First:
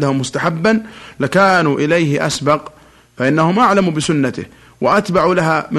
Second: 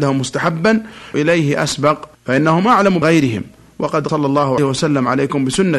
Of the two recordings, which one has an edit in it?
second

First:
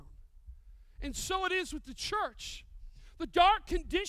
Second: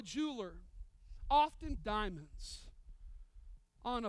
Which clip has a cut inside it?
second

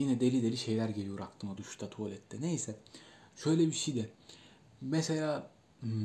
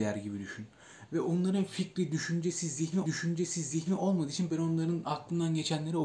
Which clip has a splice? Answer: second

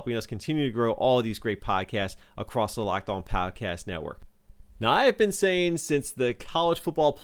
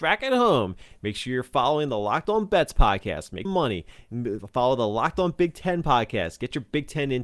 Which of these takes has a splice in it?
second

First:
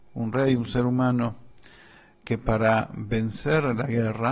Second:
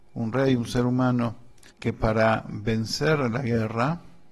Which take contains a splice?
second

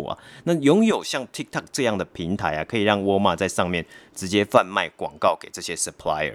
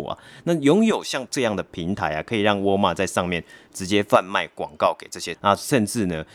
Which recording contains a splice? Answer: second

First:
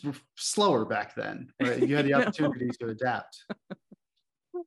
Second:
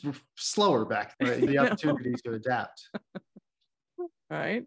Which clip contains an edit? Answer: second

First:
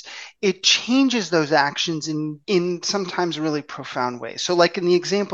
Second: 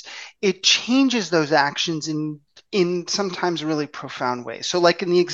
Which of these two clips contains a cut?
first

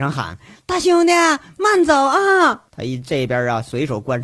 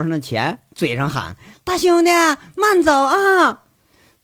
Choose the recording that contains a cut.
first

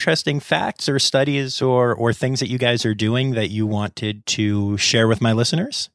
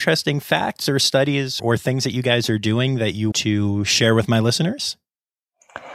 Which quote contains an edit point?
second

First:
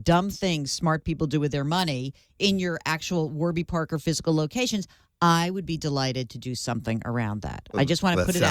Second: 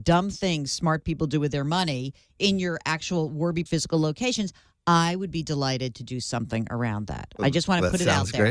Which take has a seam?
second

